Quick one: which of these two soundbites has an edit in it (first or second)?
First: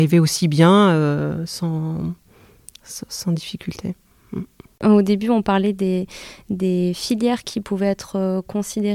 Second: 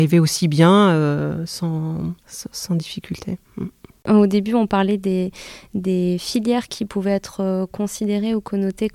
second